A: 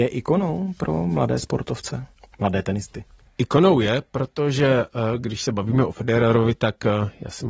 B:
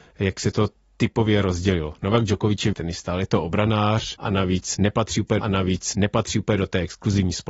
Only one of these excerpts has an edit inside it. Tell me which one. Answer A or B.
B